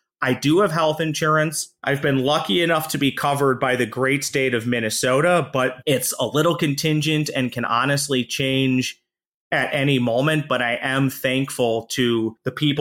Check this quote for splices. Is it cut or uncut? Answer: uncut